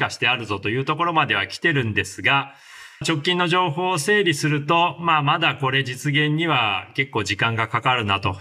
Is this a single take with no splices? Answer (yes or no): no